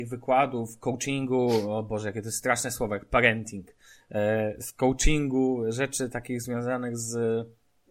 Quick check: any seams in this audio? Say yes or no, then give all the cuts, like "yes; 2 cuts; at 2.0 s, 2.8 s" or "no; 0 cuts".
no; 0 cuts